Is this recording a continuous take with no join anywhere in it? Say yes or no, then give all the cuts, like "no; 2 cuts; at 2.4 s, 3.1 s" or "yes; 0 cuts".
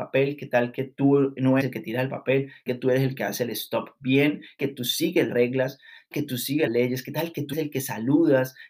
no; 7 cuts; at 1.6 s, 2.7 s, 4.6 s, 5.3 s, 6.1 s, 6.7 s, 7.5 s